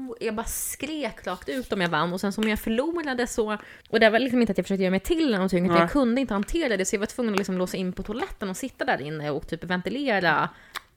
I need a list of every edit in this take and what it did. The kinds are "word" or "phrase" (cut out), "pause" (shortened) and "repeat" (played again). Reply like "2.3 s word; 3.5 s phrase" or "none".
3.8 s pause